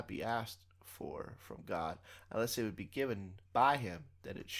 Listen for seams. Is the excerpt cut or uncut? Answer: cut